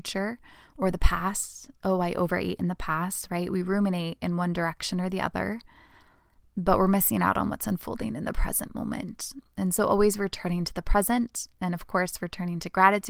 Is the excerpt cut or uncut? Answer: uncut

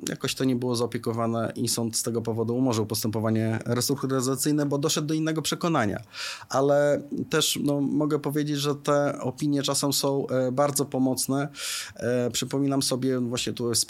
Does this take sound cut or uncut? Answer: uncut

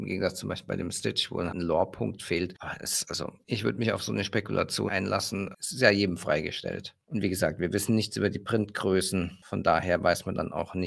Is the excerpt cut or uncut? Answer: cut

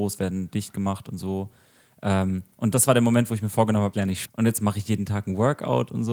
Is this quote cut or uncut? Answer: cut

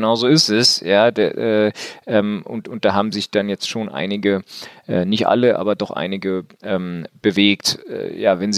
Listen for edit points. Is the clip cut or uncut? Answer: uncut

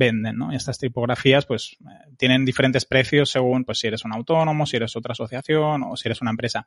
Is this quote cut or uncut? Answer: uncut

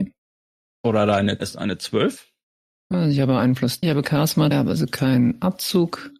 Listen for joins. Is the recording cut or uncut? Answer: cut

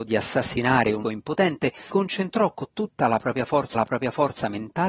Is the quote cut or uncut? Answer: cut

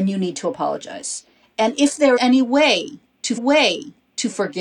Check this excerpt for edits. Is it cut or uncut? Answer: cut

